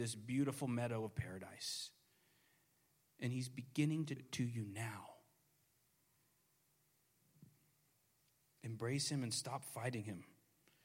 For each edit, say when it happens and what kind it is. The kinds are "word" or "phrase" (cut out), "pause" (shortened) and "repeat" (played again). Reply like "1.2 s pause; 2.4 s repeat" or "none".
4.2 s word